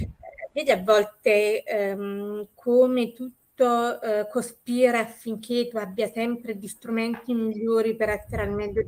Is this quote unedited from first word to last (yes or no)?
yes